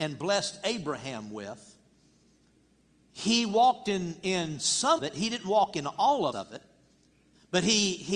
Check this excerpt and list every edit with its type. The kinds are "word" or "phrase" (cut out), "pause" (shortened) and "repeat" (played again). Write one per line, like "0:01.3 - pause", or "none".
0:02.6 - pause
0:05.0 - word
0:06.3 - phrase